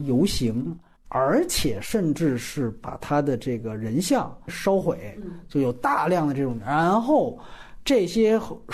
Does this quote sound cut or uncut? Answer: cut